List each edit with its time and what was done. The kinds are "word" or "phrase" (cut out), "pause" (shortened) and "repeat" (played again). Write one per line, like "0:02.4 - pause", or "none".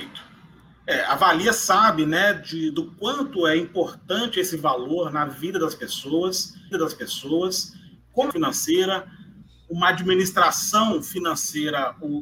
0:06.7 - repeat
0:08.3 - phrase